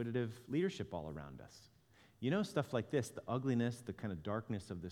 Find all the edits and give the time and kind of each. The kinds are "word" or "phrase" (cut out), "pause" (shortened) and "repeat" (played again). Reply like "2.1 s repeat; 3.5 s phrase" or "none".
none